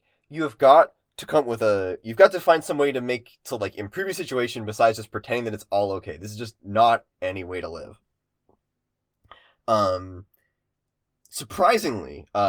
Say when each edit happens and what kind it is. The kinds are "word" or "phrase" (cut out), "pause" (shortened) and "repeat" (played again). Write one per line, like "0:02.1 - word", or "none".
none

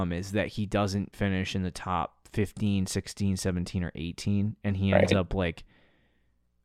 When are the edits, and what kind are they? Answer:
0:01.1 - word

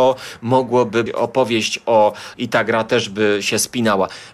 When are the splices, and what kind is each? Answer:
0:01.1 - word
0:02.3 - phrase

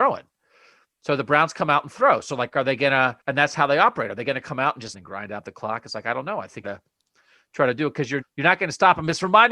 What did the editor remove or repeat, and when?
0:03.2 - pause
0:04.9 - phrase
0:06.6 - phrase
0:08.2 - word

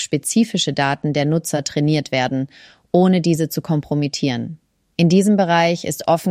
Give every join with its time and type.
none

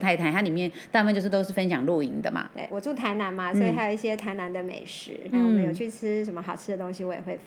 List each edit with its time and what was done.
0:02.7 - word
0:05.3 - word

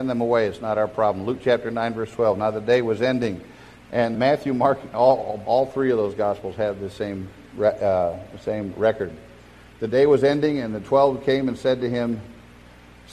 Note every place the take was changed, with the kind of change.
0:04.1 - word
0:05.4 - word

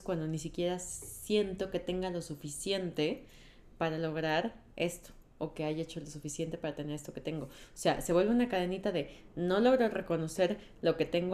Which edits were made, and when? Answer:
none

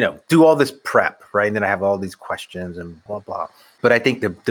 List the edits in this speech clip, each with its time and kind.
0:03.1 - word

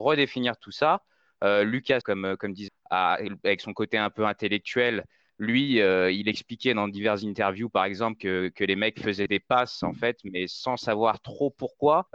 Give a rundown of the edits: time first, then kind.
0:02.0 - word
0:02.7 - word

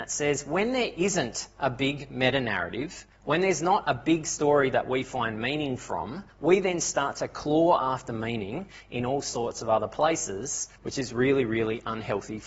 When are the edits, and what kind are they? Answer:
0:03.1 - pause
0:06.3 - pause
0:10.8 - pause

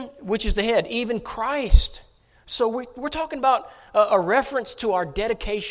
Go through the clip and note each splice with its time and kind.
none

